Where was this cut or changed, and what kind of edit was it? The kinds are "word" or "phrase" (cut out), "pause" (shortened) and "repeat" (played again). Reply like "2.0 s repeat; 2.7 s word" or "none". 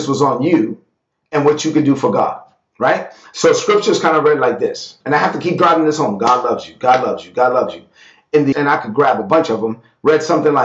5.0 s pause; 8.5 s phrase